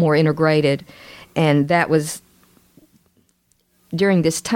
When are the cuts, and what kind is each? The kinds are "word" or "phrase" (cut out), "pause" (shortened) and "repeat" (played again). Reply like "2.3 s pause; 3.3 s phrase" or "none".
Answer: none